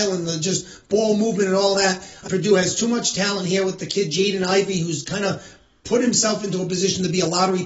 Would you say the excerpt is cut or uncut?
cut